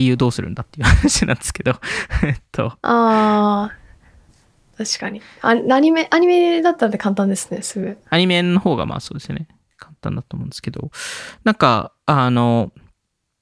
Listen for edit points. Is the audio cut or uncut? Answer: uncut